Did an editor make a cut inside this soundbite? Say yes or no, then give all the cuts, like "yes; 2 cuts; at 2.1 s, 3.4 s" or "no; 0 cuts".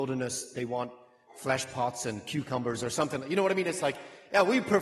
no; 0 cuts